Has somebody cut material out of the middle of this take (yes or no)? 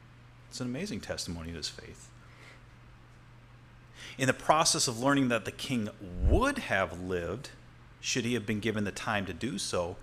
no